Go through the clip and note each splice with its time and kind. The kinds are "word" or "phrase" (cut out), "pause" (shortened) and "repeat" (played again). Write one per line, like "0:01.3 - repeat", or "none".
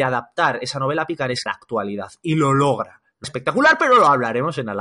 0:01.5 - word
0:03.2 - phrase